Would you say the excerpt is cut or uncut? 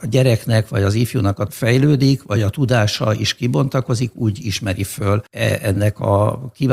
cut